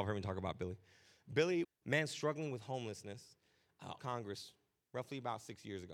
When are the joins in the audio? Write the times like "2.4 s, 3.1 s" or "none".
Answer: 1.6 s, 4.0 s